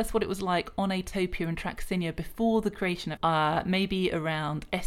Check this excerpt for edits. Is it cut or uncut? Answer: cut